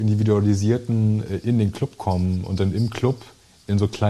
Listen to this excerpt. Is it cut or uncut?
uncut